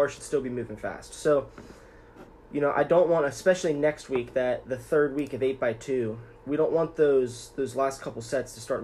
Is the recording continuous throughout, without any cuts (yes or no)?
yes